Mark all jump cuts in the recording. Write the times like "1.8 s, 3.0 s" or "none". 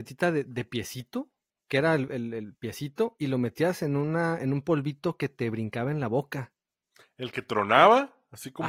none